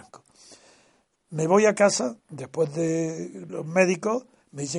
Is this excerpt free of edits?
no; 2 cuts; at 2.2 s, 3.5 s

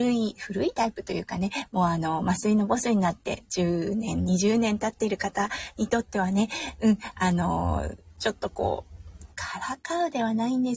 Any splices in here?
yes; 1 cut; at 9.3 s

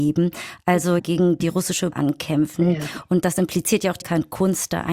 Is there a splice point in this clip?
yes; 4 cuts; at 1.0 s, 1.9 s, 3.2 s, 4.0 s

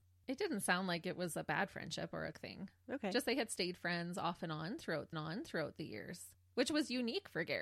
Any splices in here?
yes; 2 cuts; at 2.3 s, 5.1 s

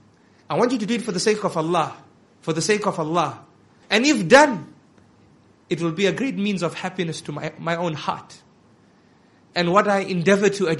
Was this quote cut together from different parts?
no; 0 cuts

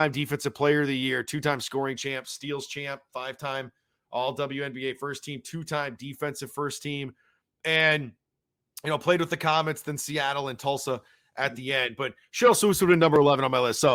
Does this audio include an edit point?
no; 0 cuts

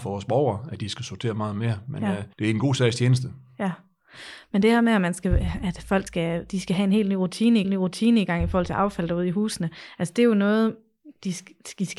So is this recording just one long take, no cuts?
no; 3 cuts; at 2.3 s, 6.1 s, 7.6 s

